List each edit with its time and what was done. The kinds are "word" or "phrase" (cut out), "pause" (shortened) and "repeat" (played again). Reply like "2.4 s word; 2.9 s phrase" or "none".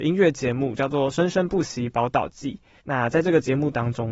2.8 s pause